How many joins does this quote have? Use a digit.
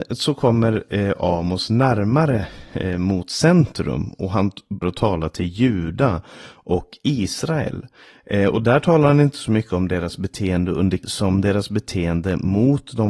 2